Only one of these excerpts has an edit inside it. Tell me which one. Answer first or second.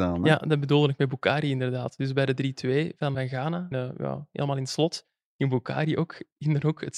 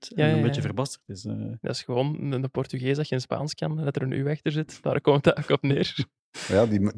first